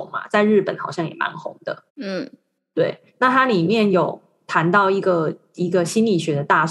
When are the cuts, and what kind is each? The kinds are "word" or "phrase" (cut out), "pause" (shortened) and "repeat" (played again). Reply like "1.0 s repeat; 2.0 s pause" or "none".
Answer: 1.9 s pause